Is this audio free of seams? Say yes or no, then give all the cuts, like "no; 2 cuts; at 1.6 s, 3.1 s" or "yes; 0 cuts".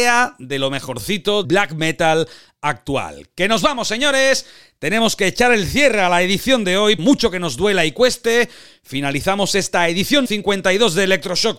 no; 3 cuts; at 1.4 s, 7.0 s, 10.3 s